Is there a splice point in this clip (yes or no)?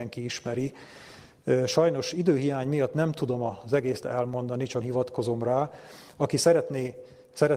yes